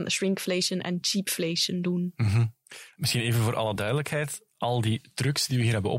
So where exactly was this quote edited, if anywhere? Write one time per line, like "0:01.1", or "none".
none